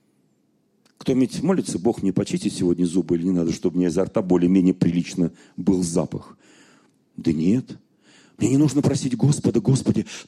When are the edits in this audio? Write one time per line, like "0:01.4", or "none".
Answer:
none